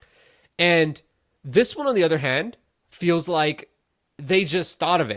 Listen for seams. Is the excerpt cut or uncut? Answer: uncut